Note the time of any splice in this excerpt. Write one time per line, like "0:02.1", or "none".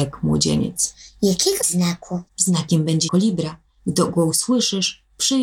0:01.6
0:02.3
0:03.1